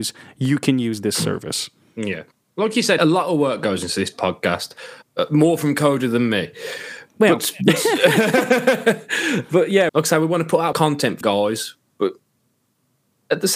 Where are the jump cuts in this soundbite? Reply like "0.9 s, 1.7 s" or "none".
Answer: 3.0 s, 9.9 s, 10.7 s, 11.2 s